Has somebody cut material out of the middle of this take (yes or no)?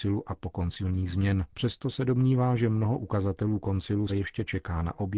yes